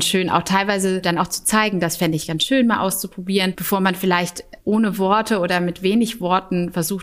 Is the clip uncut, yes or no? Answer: no